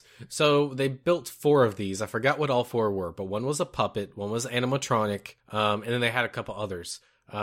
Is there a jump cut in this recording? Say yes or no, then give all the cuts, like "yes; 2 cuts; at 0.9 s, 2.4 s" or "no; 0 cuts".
yes; 1 cut; at 5.4 s